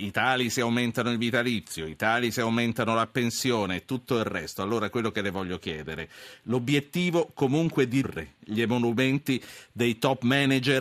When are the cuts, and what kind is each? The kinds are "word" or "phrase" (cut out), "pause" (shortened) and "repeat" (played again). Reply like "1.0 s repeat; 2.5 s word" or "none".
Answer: 8.0 s word